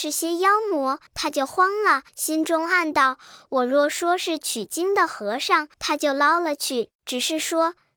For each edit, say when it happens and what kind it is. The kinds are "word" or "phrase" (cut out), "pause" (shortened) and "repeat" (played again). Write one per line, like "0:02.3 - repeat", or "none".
0:01.1 - pause
0:02.1 - pause
0:05.7 - pause
0:07.0 - pause